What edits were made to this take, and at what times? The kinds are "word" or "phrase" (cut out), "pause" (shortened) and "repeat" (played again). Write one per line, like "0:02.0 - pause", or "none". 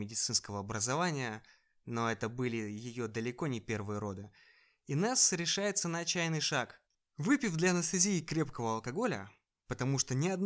0:06.9 - pause

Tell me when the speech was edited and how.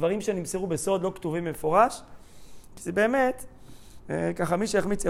none

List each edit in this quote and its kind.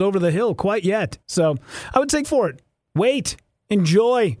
0:01.2 - pause
0:02.2 - word
0:02.8 - pause

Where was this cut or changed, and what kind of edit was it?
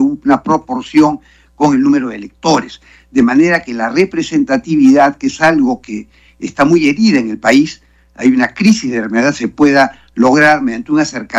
none

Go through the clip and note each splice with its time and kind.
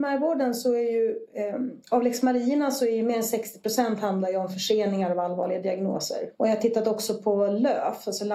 0:01.8 - pause
0:06.3 - pause

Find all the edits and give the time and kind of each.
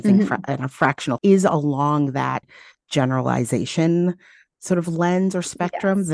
0:01.2 - word
0:02.4 - word

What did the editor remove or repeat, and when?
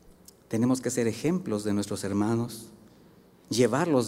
none

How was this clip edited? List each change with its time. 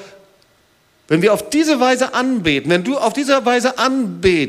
none

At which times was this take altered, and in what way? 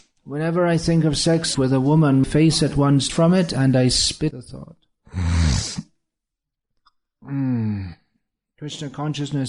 0:01.5 - word
0:02.2 - word
0:03.1 - word
0:04.3 - word

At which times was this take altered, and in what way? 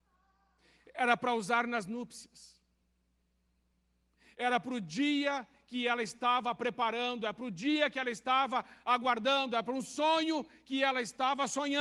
none

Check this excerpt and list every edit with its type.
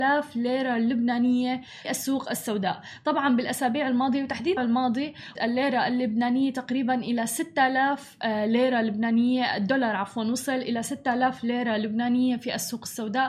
0:01.8 - word
0:04.6 - word
0:05.4 - word

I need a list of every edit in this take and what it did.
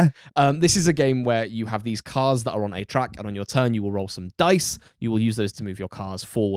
0:05.5 - word

